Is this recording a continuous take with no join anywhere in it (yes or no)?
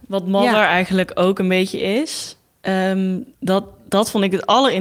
no